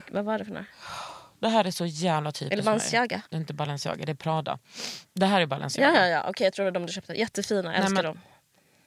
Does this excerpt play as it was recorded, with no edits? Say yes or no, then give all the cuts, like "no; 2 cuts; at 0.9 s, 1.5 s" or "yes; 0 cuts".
no; 1 cut; at 3.3 s